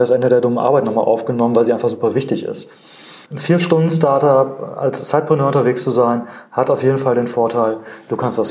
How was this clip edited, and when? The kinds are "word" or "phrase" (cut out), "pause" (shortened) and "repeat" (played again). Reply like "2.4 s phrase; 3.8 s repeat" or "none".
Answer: 3.3 s pause